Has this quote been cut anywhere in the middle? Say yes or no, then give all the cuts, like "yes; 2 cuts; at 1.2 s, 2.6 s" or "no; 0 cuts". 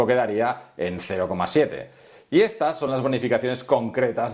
no; 0 cuts